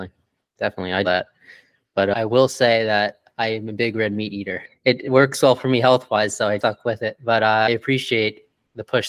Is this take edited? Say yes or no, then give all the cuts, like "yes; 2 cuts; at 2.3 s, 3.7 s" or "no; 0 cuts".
yes; 2 cuts; at 1.0 s, 6.6 s